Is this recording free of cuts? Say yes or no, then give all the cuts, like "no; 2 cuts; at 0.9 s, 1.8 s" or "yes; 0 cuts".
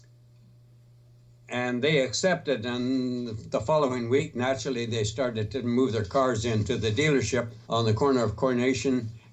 no; 1 cut; at 7.6 s